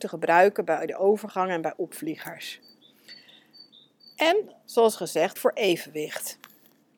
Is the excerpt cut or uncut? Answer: cut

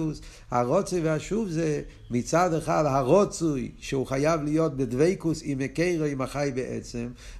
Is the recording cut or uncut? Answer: uncut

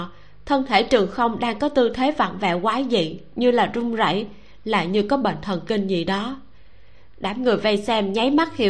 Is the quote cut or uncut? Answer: uncut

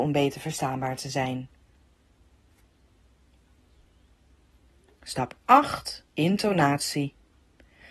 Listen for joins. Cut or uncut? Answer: cut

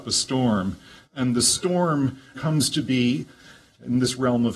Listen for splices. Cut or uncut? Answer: cut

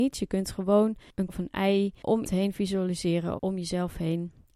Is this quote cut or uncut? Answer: cut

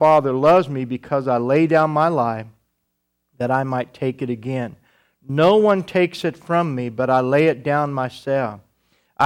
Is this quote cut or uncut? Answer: uncut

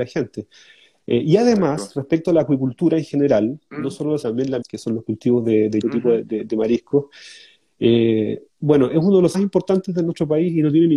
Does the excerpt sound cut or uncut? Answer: cut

